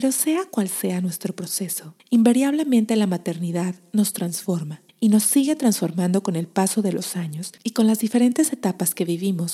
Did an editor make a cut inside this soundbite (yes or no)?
yes